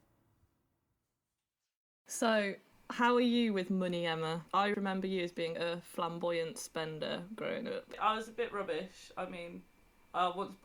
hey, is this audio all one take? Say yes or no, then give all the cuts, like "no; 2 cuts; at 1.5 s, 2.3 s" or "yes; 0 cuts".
no; 2 cuts; at 4.7 s, 5.5 s